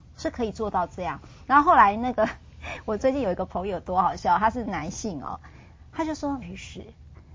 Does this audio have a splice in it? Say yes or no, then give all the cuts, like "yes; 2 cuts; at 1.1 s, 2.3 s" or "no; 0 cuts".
yes; 1 cut; at 6.4 s